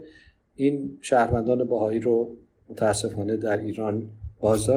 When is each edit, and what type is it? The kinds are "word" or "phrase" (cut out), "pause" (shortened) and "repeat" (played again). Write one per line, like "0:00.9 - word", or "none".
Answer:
none